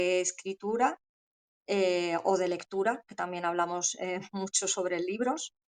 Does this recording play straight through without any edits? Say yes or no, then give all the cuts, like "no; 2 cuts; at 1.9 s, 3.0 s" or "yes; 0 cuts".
yes; 0 cuts